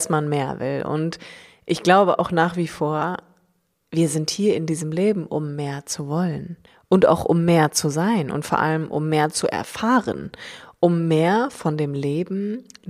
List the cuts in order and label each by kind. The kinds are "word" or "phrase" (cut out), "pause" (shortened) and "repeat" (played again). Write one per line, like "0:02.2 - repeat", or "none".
0:06.7 - pause

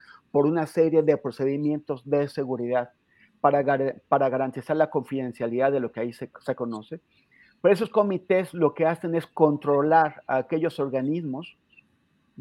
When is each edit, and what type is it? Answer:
0:06.3 - word

